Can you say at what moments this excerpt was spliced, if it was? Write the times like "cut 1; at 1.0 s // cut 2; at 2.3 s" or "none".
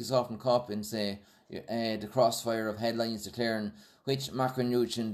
none

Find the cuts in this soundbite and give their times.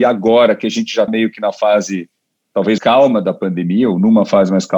cut 1; at 1.1 s // cut 2; at 2.8 s

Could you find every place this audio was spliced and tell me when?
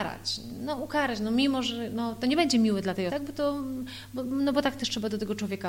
cut 1; at 3.1 s

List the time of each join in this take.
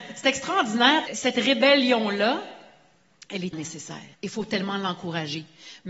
cut 1; at 1.1 s // cut 2; at 3.5 s // cut 3; at 4.1 s

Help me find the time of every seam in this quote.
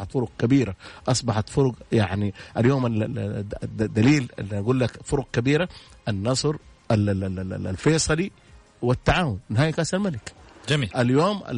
none

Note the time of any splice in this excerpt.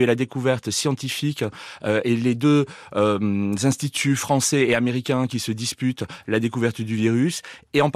none

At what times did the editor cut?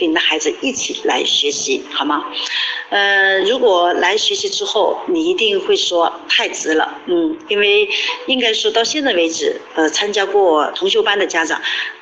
none

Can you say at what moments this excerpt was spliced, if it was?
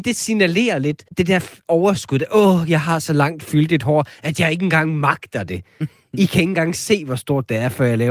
cut 1; at 1.1 s

